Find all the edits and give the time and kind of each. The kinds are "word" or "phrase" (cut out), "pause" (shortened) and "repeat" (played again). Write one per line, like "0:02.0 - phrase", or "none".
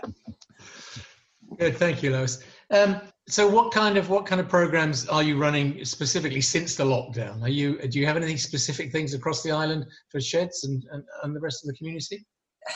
0:03.1 - pause